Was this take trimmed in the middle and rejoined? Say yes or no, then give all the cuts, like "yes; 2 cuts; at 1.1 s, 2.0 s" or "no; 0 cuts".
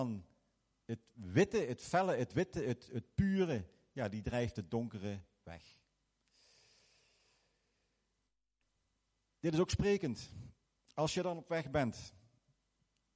no; 0 cuts